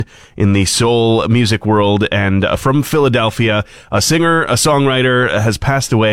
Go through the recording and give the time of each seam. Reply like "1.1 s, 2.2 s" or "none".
none